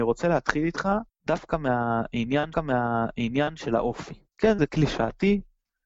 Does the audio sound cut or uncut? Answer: cut